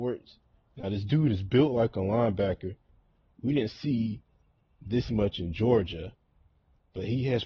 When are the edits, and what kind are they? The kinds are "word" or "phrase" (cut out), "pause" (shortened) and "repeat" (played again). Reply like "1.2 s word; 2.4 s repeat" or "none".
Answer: none